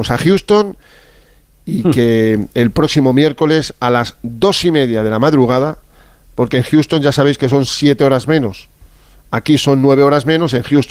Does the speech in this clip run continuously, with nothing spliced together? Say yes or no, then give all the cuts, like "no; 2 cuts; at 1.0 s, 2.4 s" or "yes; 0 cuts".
yes; 0 cuts